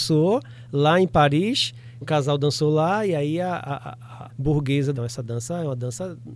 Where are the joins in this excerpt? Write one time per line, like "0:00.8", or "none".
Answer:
0:02.0
0:04.3
0:05.0